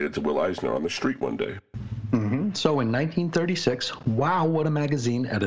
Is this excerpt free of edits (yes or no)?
yes